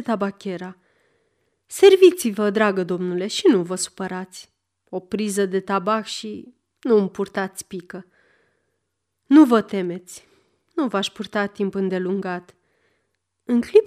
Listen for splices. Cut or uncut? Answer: uncut